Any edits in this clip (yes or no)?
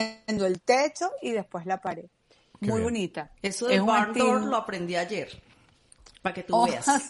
no